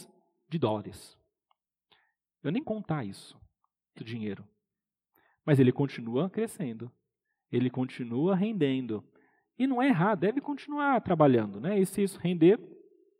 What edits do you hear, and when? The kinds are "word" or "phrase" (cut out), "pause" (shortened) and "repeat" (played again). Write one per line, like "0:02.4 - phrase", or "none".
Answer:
0:02.6 - word
0:04.0 - word
0:10.2 - word